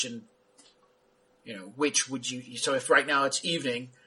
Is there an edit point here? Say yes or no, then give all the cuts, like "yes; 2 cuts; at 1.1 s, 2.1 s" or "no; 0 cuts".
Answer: no; 0 cuts